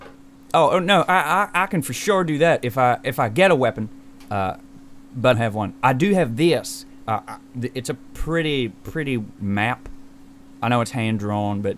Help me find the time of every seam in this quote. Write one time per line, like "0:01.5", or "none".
0:05.3
0:09.4